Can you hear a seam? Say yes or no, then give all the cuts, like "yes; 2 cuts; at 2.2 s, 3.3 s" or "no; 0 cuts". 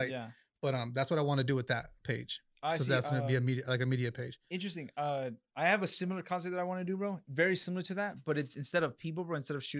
no; 0 cuts